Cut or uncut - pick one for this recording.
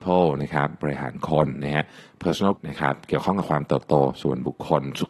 cut